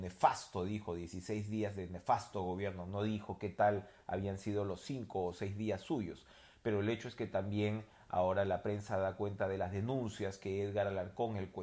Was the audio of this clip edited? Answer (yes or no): no